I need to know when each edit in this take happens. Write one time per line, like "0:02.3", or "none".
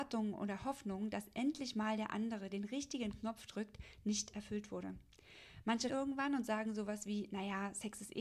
0:05.9

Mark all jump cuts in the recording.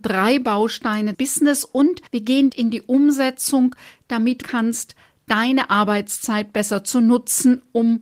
0:01.1
0:02.1
0:02.5
0:04.4

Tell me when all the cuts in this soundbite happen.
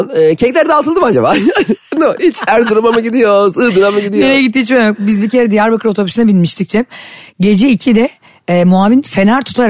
0:02.0

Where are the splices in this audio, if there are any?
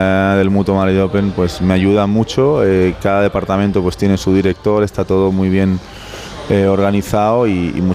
none

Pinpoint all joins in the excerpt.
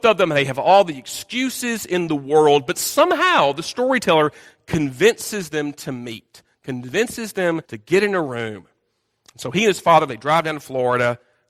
0:07.6

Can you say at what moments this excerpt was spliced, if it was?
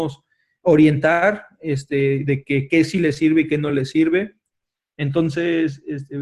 none

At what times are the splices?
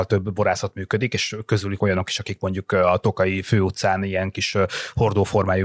0:01.8

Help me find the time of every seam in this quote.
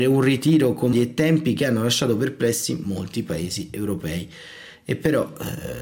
0:00.9

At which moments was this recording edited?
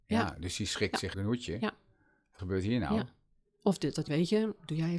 0:01.1
0:02.4
0:04.1

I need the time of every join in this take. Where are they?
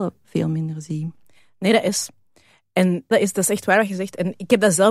0:03.1

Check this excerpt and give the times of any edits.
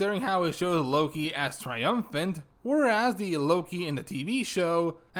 none

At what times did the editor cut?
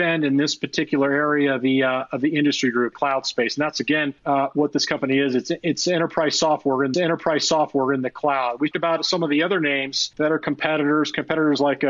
0:02.9
0:04.2
0:06.9
0:08.7
0:10.1

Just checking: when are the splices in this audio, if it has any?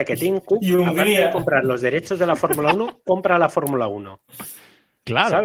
none

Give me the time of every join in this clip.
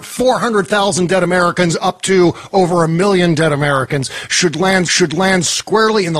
0:04.8

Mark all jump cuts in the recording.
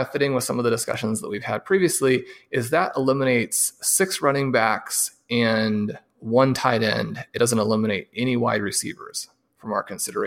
none

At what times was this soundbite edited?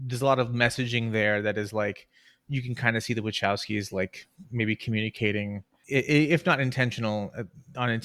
none

